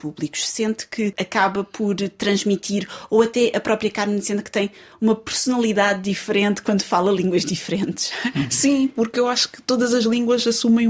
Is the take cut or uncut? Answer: uncut